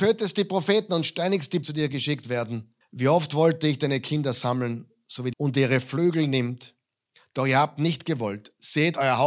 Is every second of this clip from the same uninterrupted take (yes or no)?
no